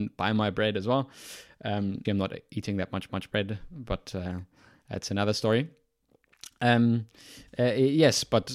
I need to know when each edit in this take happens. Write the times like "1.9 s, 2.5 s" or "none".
2.0 s, 3.1 s